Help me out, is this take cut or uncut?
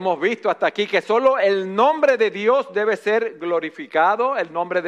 uncut